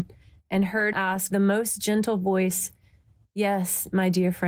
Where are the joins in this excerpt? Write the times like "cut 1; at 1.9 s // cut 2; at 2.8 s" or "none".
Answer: cut 1; at 0.9 s // cut 2; at 1.3 s

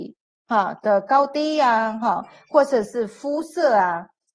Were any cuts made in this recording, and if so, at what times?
none

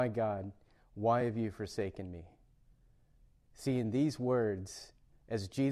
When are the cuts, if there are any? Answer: none

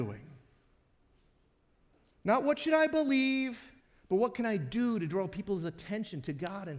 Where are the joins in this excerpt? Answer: cut 1; at 3.8 s

